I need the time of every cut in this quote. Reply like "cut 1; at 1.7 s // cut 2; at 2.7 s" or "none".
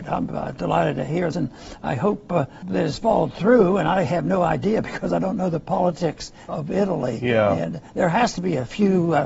cut 1; at 1.3 s // cut 2; at 2.6 s // cut 3; at 6.5 s